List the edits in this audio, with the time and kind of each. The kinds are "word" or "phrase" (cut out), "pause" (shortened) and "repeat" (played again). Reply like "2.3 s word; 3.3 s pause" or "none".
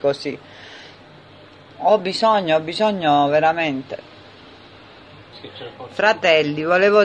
none